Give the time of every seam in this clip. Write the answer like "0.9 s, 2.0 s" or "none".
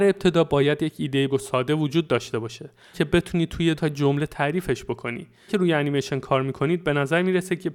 1.3 s, 2.9 s, 3.8 s, 5.5 s